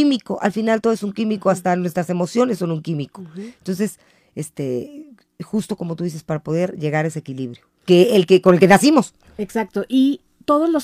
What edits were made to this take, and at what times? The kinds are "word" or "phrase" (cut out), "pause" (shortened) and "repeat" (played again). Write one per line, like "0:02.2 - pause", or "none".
none